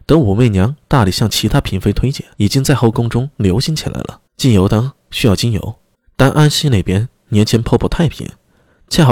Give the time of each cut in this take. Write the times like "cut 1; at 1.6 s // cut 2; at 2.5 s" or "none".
cut 1; at 2.3 s // cut 2; at 4.3 s // cut 3; at 5.9 s

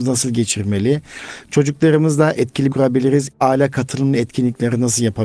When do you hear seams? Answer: cut 1; at 2.3 s // cut 2; at 2.7 s

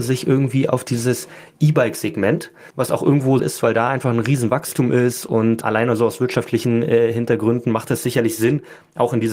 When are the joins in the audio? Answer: cut 1; at 2.7 s // cut 2; at 3.4 s

